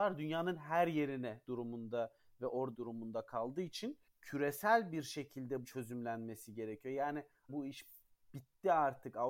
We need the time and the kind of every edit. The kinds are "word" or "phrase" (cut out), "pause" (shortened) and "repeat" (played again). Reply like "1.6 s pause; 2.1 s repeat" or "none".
1.4 s word; 2.7 s word; 4.1 s pause; 5.6 s phrase; 7.5 s word